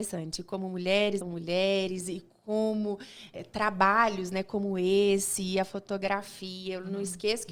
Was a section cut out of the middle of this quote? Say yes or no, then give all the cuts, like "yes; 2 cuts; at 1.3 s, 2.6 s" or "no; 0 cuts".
yes; 2 cuts; at 1.2 s, 3.3 s